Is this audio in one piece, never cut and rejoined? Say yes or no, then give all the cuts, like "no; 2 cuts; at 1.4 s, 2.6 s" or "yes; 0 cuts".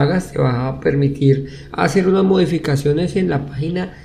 yes; 0 cuts